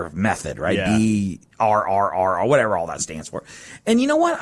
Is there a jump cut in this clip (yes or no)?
no